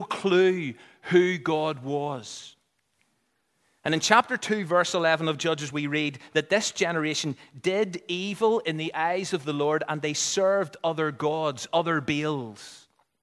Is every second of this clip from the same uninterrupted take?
yes; 0 cuts

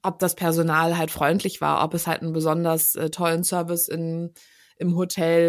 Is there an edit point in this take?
no; 0 cuts

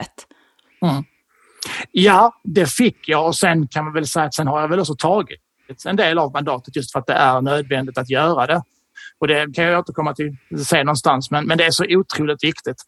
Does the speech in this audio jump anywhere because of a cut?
no; 0 cuts

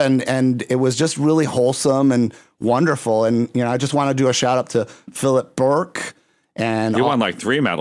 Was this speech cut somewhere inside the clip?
no; 0 cuts

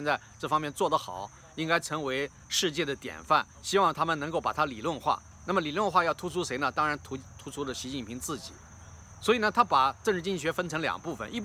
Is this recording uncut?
no; 1 cut; at 3.5 s

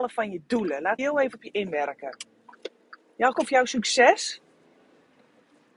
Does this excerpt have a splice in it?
yes; 2 cuts; at 1.0 s, 3.3 s

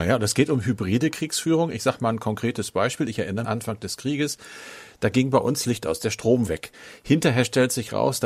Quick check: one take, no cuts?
no; 3 cuts; at 3.4 s, 5.6 s, 6.5 s

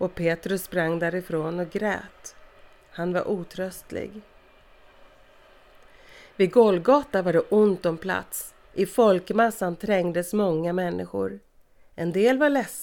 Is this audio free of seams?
no; 1 cut; at 8.6 s

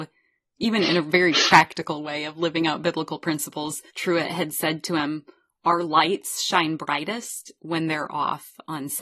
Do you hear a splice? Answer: yes; 1 cut; at 3.9 s

